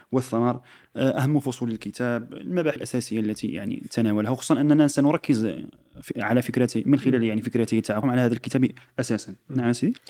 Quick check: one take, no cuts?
no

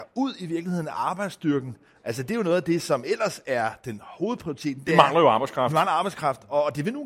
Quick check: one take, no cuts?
yes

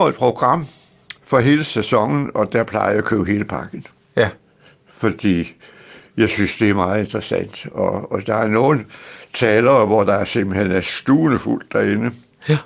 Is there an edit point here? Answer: no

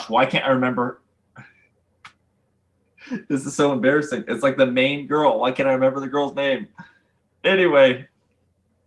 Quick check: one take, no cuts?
yes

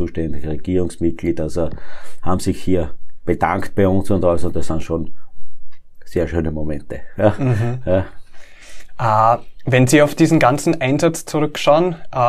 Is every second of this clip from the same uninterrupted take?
yes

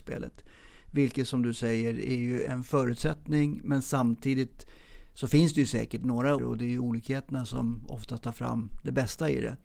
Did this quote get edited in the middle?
yes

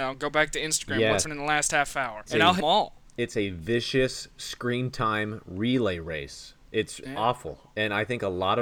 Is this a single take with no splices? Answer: no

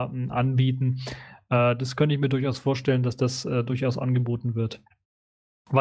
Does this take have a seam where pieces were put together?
no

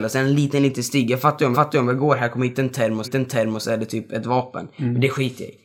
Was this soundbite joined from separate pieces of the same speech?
yes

